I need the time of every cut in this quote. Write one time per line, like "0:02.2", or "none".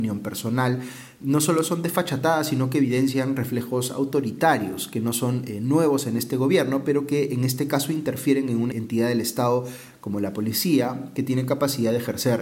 0:01.2
0:08.7